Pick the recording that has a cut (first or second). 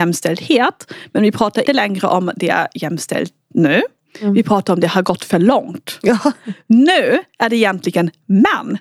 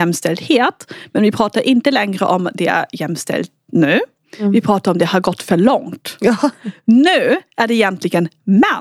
first